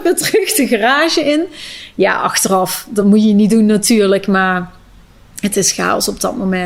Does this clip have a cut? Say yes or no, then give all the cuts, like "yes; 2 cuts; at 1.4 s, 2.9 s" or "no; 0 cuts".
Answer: no; 0 cuts